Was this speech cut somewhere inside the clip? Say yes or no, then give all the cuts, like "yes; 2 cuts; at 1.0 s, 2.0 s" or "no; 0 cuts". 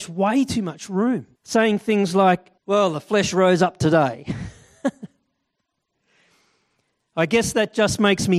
yes; 2 cuts; at 1.4 s, 2.6 s